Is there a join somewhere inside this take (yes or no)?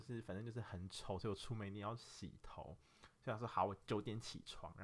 no